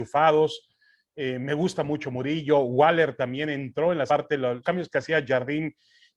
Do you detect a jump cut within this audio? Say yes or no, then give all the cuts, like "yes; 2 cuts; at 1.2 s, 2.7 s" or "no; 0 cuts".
yes; 2 cuts; at 4.1 s, 4.6 s